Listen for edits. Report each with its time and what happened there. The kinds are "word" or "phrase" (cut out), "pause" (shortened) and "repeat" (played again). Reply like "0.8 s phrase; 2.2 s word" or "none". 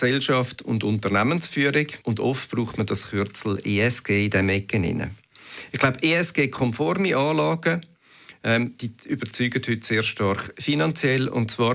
2.0 s pause